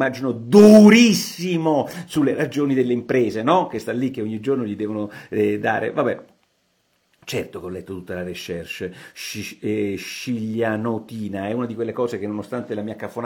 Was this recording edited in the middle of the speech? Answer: no; 0 cuts

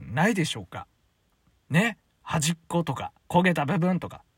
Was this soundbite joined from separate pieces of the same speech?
yes; 1 cut; at 3.2 s

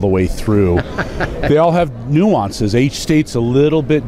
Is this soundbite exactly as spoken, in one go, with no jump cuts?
yes; 0 cuts

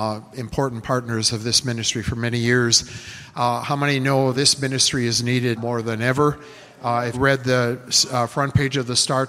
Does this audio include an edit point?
yes; 3 cuts; at 4.3 s, 5.6 s, 7.1 s

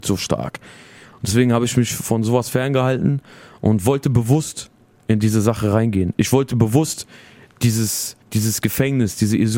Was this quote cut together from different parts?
yes; 1 cut; at 8.2 s

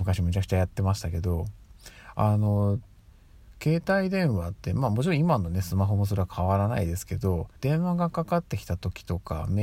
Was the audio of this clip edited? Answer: yes; 1 cut; at 7.6 s

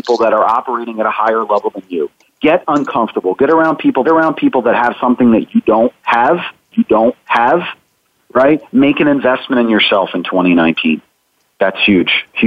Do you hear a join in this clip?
yes; 2 cuts; at 4.0 s, 6.7 s

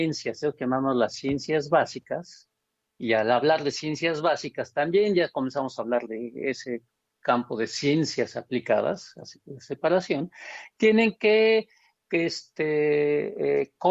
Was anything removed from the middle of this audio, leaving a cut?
no; 0 cuts

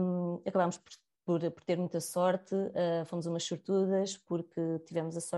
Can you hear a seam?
no; 0 cuts

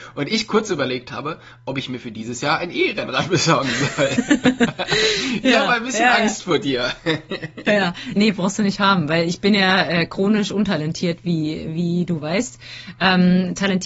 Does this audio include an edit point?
yes; 1 cut; at 8.2 s

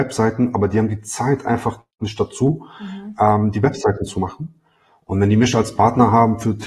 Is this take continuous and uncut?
yes; 0 cuts

